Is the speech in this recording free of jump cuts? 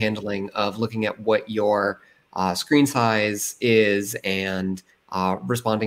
yes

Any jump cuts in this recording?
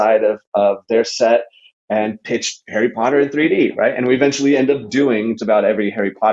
yes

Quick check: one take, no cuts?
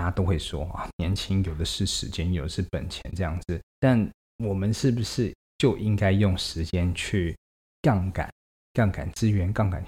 no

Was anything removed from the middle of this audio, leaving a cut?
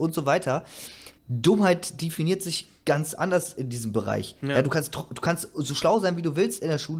yes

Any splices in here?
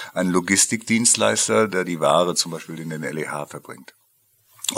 no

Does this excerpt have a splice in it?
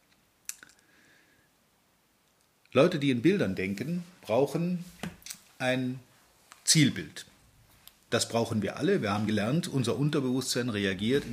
no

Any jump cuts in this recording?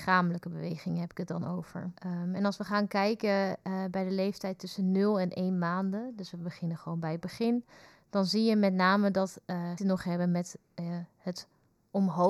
yes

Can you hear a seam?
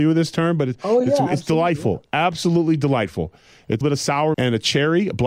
yes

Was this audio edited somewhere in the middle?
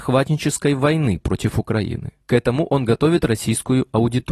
no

